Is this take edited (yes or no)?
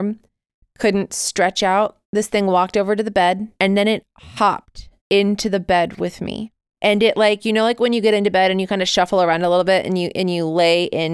yes